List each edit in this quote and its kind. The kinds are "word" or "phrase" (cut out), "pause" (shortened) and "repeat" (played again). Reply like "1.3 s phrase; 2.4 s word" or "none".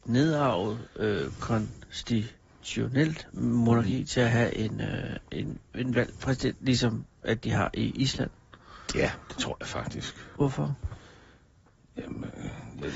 none